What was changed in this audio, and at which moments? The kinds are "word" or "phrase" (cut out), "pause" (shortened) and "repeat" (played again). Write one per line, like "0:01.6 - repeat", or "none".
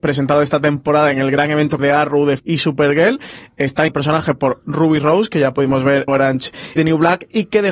0:01.8 - word
0:02.4 - word
0:03.9 - word
0:04.6 - phrase
0:06.1 - word
0:06.8 - word